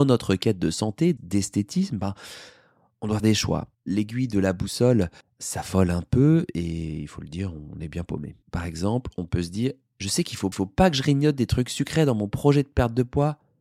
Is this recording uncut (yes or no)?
no